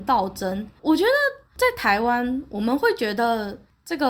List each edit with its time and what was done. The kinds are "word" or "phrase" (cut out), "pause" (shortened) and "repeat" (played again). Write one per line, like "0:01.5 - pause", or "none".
0:01.4 - pause